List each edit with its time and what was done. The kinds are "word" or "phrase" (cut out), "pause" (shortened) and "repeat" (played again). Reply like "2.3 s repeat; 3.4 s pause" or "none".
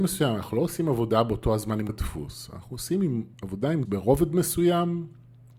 1.9 s word; 3.3 s pause; 3.9 s word